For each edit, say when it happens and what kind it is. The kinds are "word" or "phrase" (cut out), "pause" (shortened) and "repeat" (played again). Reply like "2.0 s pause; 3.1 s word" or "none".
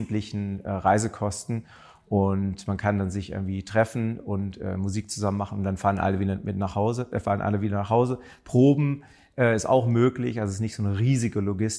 none